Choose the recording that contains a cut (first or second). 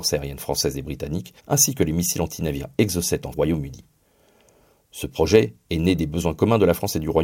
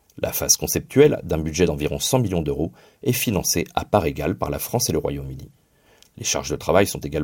first